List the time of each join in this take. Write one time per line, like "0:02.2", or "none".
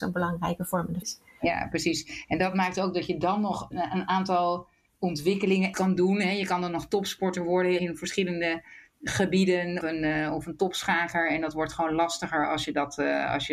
0:01.0
0:03.7
0:05.7
0:07.8
0:09.8